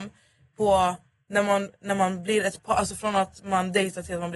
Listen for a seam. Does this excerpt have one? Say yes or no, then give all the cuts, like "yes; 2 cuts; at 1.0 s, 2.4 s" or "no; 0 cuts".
no; 0 cuts